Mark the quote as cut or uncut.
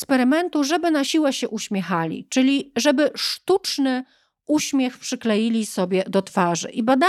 uncut